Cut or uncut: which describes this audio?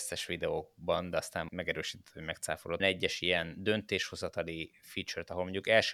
cut